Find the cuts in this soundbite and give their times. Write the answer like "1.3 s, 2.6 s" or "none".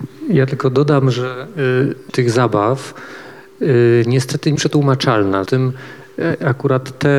2.1 s, 4.6 s, 5.5 s